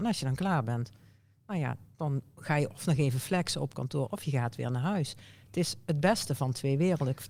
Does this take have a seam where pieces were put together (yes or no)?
no